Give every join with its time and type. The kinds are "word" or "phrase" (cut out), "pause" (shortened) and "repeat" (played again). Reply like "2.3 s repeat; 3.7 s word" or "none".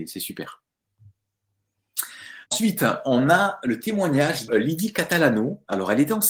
2.5 s pause; 4.5 s word